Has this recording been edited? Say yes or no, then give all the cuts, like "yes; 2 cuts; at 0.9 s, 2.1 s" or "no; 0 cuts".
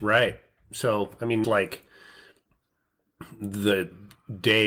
yes; 1 cut; at 1.4 s